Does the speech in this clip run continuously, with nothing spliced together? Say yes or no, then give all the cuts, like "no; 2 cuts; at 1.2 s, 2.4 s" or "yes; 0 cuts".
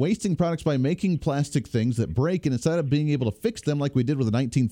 yes; 0 cuts